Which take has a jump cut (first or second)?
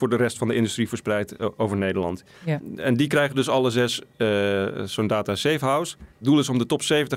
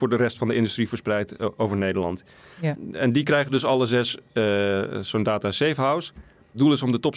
first